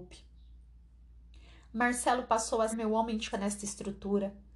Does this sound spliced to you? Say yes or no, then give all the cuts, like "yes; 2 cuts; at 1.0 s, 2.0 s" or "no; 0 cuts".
yes; 2 cuts; at 2.7 s, 3.3 s